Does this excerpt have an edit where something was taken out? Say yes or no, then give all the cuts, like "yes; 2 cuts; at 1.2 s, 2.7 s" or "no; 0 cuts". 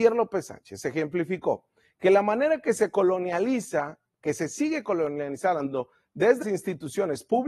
yes; 1 cut; at 6.4 s